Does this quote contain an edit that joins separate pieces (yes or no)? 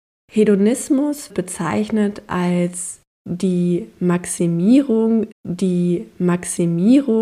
yes